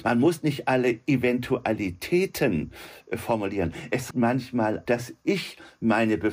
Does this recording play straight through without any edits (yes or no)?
no